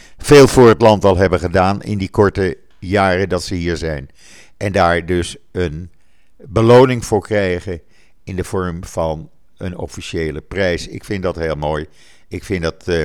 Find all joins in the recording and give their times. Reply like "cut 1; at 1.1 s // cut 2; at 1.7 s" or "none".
none

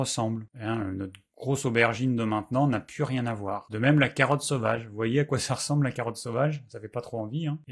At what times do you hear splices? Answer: none

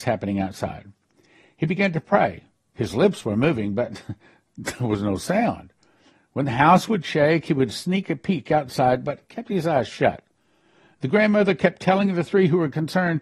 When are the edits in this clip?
none

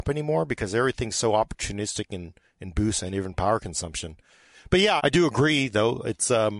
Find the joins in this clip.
cut 1; at 5.0 s

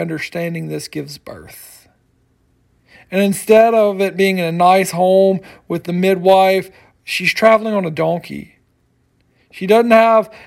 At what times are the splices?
none

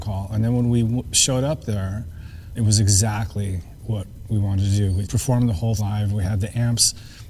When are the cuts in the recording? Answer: cut 1; at 2.6 s // cut 2; at 5.0 s // cut 3; at 5.8 s

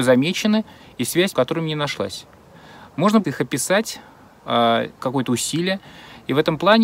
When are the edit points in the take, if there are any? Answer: cut 1; at 1.3 s // cut 2; at 3.2 s // cut 3; at 5.0 s

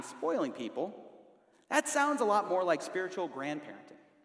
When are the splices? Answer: none

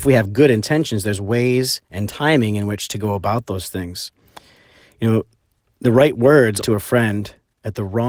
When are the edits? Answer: cut 1; at 6.6 s

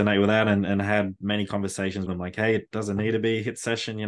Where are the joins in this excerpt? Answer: cut 1; at 2.1 s

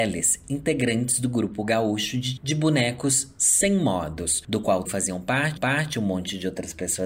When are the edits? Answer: cut 1; at 2.4 s // cut 2; at 4.8 s // cut 3; at 5.6 s

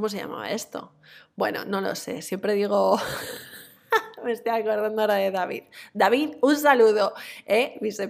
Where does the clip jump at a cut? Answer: none

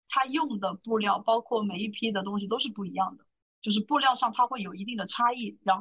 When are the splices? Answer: none

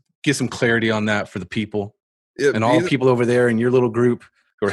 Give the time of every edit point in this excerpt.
none

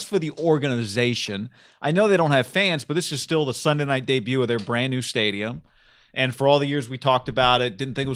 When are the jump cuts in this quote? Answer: none

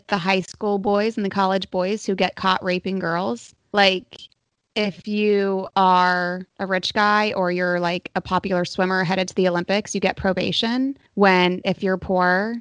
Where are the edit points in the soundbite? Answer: cut 1; at 6.5 s // cut 2; at 11.1 s

